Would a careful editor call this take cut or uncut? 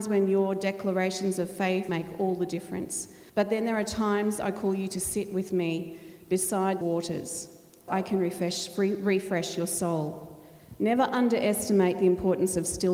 cut